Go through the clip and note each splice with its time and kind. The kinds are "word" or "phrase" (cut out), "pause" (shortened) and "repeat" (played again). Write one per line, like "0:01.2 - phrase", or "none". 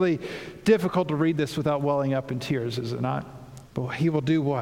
0:03.7 - pause